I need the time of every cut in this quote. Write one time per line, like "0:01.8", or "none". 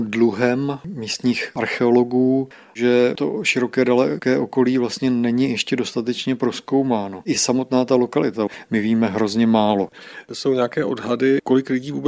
none